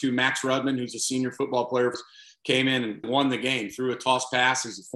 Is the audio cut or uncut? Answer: cut